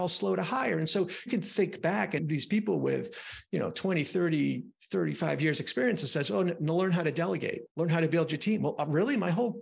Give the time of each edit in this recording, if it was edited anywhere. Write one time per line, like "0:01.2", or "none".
0:01.3
0:02.2
0:07.7